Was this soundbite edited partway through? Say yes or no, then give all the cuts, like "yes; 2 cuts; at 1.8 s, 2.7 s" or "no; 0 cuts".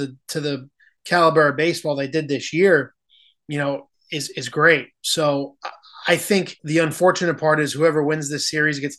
yes; 1 cut; at 6.6 s